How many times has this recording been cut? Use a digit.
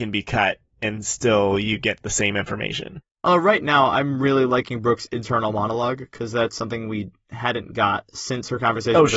0